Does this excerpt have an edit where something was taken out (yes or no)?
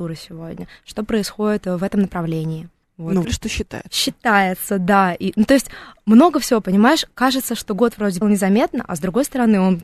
yes